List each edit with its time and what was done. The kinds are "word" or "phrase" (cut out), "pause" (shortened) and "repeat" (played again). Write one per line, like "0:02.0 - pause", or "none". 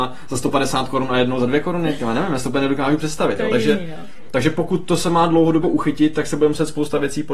0:05.6 - word